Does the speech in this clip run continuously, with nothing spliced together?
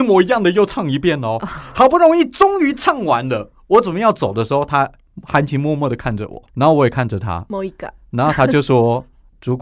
no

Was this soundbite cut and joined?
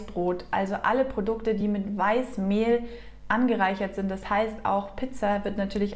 no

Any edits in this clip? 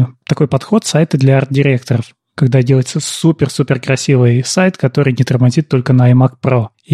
no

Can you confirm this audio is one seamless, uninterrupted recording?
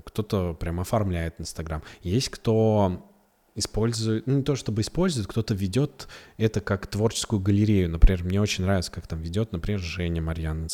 yes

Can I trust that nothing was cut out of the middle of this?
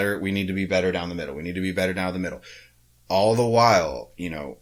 yes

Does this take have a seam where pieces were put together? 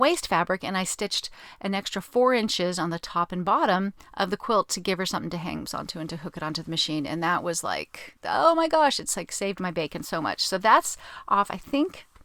yes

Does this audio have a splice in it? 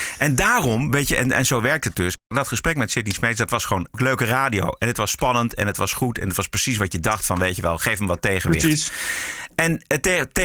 no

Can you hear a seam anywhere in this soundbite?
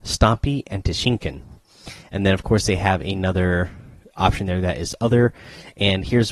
no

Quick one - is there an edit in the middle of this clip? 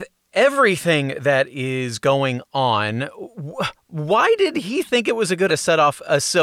yes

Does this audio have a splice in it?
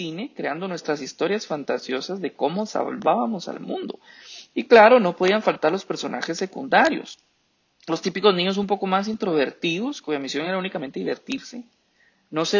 no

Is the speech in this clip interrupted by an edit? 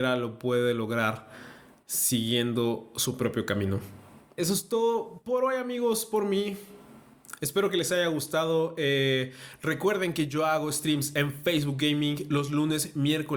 no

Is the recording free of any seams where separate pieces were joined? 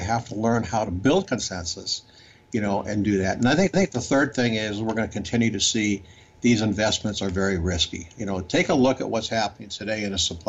no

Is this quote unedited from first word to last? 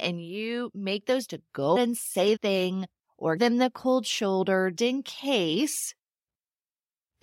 no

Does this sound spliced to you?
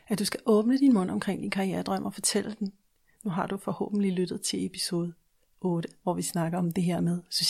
no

